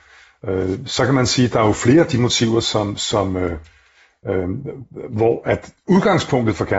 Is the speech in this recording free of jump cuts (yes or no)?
yes